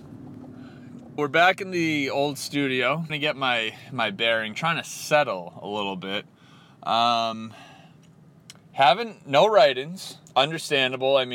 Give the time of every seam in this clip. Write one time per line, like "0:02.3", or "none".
0:01.2
0:03.1
0:04.5
0:10.3